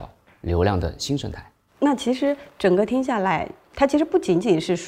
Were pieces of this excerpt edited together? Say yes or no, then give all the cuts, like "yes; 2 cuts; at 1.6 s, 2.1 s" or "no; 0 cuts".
no; 0 cuts